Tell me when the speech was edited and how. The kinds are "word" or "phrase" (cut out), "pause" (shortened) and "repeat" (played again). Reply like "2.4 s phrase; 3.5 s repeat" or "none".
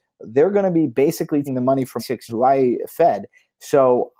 1.5 s word; 2.0 s word; 2.3 s word